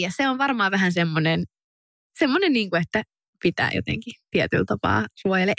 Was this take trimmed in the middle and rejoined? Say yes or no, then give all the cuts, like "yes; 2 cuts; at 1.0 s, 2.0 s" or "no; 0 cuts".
no; 0 cuts